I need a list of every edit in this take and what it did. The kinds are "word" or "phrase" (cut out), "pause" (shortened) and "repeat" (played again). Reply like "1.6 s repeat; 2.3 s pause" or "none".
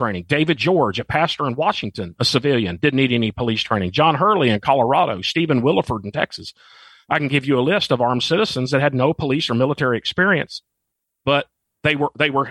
none